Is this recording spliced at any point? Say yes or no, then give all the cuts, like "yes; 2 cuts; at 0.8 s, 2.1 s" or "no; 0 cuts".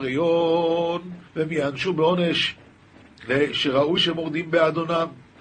yes; 2 cuts; at 1.3 s, 4.0 s